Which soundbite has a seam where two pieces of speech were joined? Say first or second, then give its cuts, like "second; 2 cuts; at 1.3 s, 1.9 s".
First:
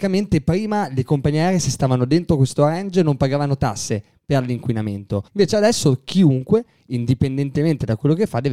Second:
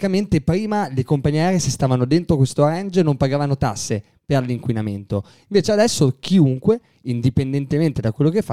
first; 1 cut; at 5.3 s